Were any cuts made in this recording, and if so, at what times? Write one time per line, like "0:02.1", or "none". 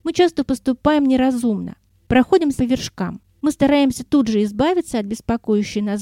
0:02.6